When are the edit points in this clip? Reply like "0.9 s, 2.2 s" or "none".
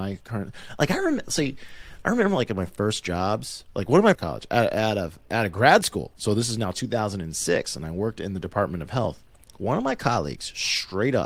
4.1 s